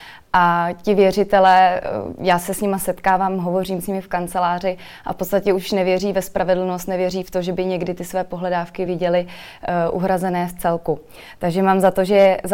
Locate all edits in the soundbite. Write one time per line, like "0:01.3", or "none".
none